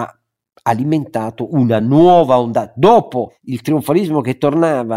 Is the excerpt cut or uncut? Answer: uncut